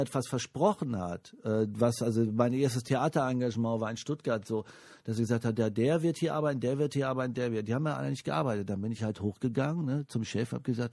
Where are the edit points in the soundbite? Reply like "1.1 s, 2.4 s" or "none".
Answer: none